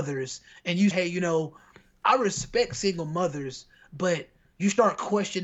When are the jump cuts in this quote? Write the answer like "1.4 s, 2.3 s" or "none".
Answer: 0.9 s